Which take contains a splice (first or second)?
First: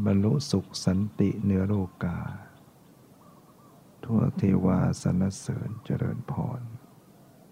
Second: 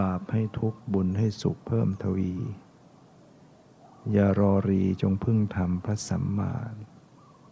second